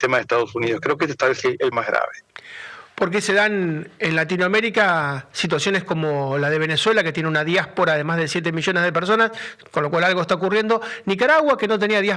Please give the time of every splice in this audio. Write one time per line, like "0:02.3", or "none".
0:01.7